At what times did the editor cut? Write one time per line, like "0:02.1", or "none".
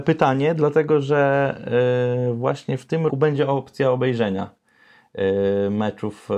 0:03.1